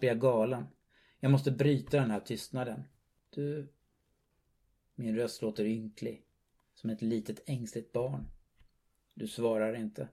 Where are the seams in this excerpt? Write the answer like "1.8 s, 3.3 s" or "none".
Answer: none